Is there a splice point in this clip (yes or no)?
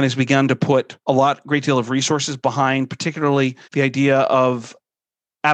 yes